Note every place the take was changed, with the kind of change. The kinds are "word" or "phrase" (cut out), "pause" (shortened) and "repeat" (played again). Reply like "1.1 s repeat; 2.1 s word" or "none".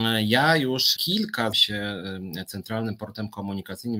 1.0 s phrase; 1.5 s word